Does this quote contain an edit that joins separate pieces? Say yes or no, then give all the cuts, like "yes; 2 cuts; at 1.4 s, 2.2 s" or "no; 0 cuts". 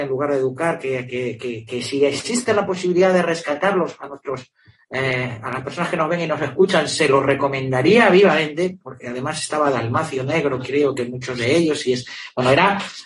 no; 0 cuts